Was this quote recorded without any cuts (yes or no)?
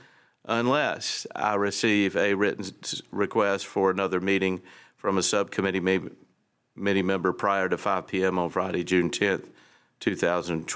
yes